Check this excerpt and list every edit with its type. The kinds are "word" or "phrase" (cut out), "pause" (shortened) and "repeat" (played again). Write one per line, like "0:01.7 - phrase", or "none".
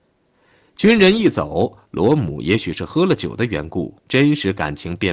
0:04.0 - pause

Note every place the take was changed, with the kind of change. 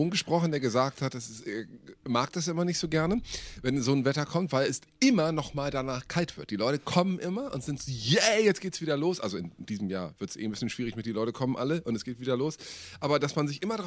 none

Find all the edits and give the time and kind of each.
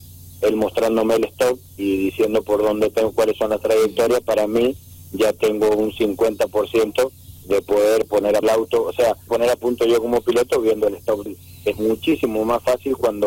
0:07.4 - word
0:08.4 - word
0:09.3 - word
0:11.3 - word

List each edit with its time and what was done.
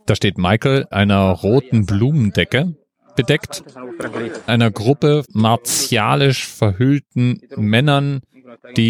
0:00.9 - word
0:04.5 - word
0:05.2 - word

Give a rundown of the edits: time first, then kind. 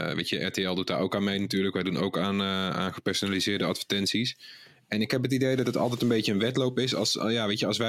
none

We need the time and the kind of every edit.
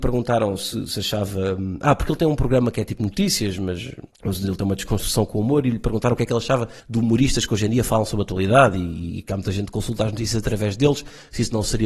0:04.1 - pause
0:06.8 - pause

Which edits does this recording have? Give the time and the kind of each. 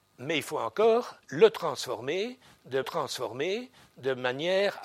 0:01.2 - pause
0:02.8 - repeat

